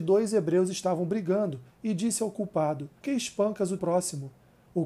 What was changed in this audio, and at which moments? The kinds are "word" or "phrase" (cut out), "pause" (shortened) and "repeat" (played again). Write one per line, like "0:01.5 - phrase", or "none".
0:01.7 - pause
0:03.0 - word
0:03.8 - word